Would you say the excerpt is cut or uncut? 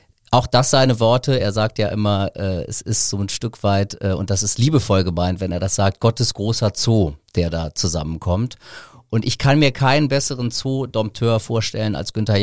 uncut